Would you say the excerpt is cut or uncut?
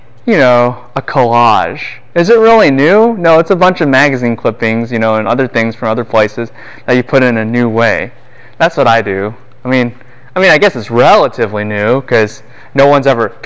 uncut